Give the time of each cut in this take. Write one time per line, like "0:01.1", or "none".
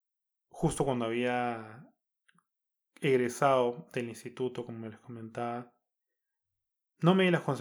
none